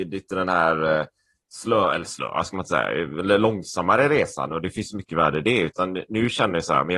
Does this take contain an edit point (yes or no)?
no